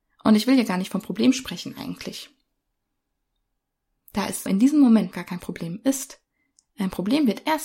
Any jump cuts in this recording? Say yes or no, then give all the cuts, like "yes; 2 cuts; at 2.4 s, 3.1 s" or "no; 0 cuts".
yes; 2 cuts; at 4.5 s, 5.1 s